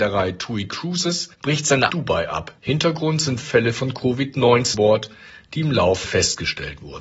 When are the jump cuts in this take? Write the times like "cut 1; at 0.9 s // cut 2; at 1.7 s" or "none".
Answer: cut 1; at 1.3 s // cut 2; at 1.9 s // cut 3; at 2.6 s // cut 4; at 3.4 s // cut 5; at 4.7 s // cut 6; at 6.0 s